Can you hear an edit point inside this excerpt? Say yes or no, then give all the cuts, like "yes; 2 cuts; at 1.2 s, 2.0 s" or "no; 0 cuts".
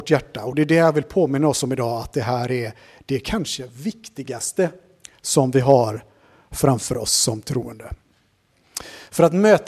no; 0 cuts